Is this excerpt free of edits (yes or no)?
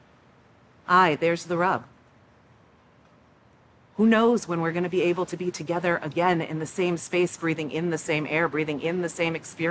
yes